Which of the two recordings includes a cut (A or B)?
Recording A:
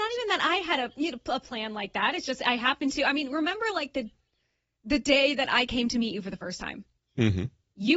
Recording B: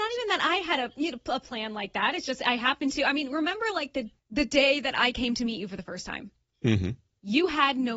B